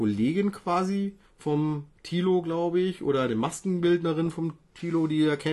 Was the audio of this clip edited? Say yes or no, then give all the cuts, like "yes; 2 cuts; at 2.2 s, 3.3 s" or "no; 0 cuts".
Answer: yes; 1 cut; at 1.2 s